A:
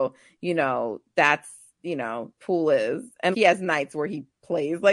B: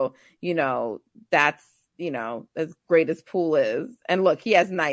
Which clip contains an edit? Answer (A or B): A